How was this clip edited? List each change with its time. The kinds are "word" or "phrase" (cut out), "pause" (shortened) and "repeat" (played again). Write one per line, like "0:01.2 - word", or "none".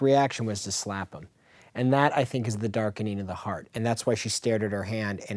none